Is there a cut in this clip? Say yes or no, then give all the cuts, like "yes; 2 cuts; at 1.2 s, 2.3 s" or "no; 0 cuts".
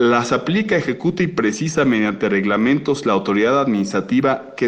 no; 0 cuts